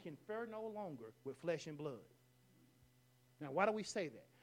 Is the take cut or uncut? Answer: uncut